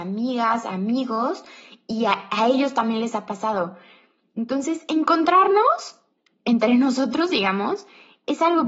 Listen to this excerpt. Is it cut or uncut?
uncut